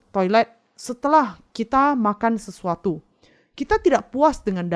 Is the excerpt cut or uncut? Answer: uncut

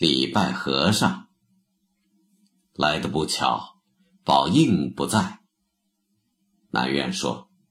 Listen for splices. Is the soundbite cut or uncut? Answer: uncut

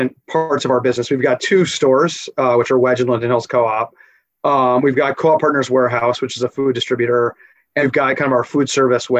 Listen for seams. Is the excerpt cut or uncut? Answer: cut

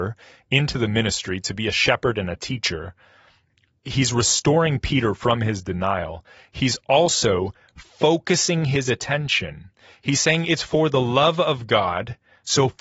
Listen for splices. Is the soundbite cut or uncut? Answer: uncut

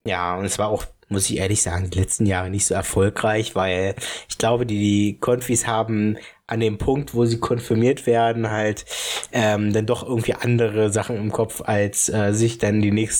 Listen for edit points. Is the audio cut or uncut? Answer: uncut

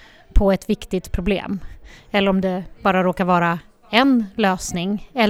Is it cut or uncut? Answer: uncut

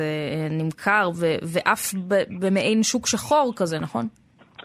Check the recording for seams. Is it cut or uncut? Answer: uncut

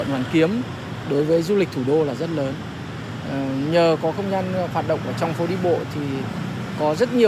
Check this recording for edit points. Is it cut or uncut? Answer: uncut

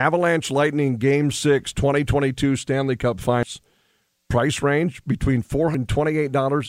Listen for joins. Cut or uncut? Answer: uncut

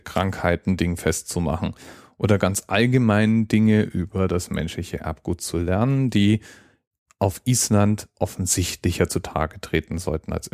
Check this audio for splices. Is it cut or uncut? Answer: uncut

